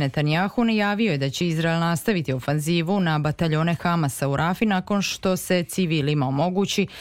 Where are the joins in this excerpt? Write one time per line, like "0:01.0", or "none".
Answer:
none